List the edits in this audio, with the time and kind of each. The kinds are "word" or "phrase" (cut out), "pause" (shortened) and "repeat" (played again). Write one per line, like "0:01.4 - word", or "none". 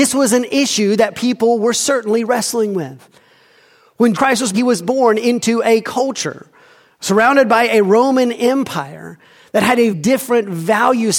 0:04.1 - word
0:04.5 - word
0:09.9 - word